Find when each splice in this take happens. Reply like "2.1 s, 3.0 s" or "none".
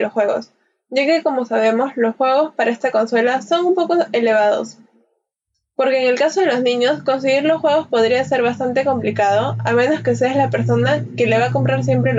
none